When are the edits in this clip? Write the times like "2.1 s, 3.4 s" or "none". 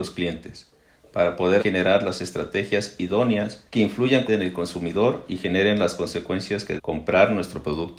1.6 s, 3.7 s, 4.3 s, 6.8 s

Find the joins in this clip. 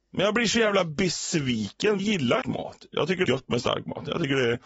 2.0 s, 2.4 s, 3.2 s

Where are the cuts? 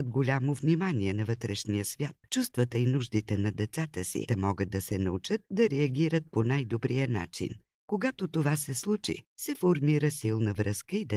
4.3 s, 7.7 s

